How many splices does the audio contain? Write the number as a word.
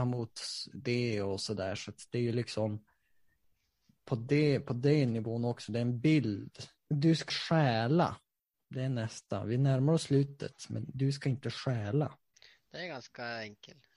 two